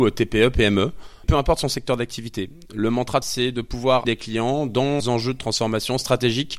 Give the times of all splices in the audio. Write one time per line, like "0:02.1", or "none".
0:01.2
0:03.2
0:04.0
0:05.0